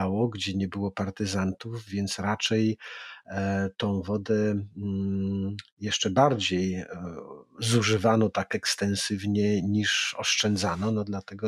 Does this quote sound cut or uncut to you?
uncut